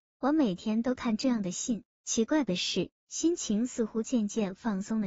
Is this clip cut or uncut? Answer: cut